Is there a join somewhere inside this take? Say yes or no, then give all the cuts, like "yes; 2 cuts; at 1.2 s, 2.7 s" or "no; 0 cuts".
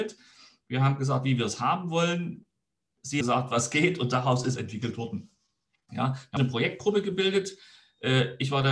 yes; 3 cuts; at 3.2 s, 4.6 s, 6.4 s